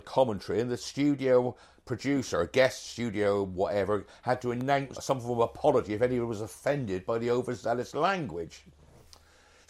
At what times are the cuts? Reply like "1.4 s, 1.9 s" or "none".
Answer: 4.9 s